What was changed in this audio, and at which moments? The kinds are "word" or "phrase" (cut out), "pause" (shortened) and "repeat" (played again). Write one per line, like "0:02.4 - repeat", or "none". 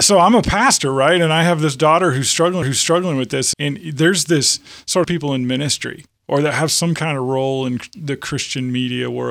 0:02.6 - repeat
0:03.5 - word
0:05.0 - phrase